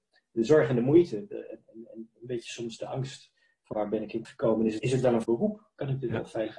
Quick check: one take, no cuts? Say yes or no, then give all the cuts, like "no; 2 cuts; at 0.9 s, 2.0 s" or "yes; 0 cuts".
no; 4 cuts; at 3.7 s, 4.2 s, 4.8 s, 5.2 s